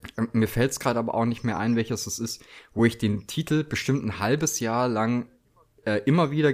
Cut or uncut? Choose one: uncut